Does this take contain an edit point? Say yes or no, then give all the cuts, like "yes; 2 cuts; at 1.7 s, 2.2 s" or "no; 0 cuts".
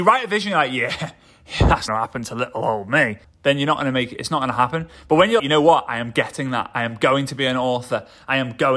yes; 3 cuts; at 1.9 s, 3.2 s, 5.4 s